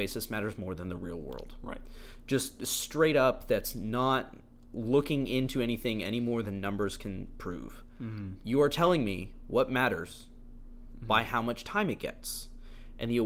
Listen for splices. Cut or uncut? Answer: uncut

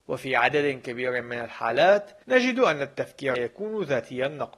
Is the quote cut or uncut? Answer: cut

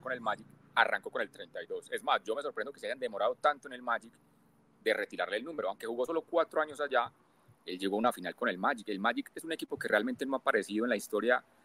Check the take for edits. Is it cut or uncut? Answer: uncut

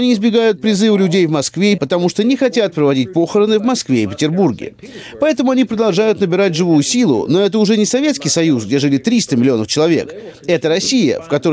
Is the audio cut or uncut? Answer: cut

